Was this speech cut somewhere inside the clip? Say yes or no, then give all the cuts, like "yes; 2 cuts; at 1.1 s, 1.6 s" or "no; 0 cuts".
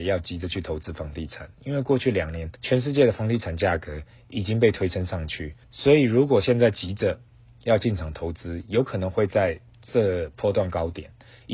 yes; 2 cuts; at 2.6 s, 5.6 s